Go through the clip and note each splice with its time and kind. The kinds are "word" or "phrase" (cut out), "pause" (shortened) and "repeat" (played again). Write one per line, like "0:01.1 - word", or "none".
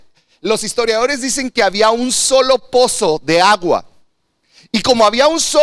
none